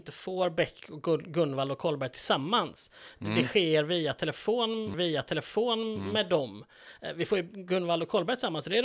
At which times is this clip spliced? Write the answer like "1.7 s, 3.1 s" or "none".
4.9 s